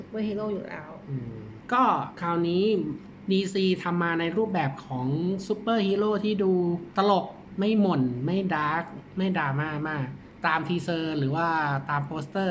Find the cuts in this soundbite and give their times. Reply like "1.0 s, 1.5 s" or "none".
none